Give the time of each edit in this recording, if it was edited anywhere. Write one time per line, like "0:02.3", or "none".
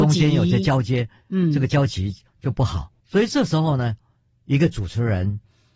0:03.0